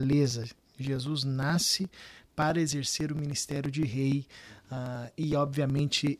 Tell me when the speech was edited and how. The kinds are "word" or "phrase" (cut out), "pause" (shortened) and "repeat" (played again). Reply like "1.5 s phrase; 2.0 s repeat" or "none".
none